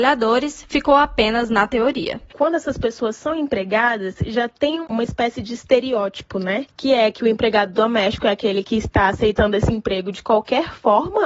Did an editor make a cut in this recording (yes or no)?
no